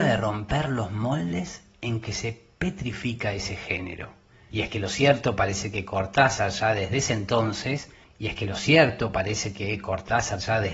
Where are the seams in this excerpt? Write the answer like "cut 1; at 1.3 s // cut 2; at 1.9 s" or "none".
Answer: none